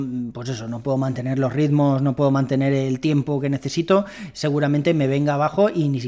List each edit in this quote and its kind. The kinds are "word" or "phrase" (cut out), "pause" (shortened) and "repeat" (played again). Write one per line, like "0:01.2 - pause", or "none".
none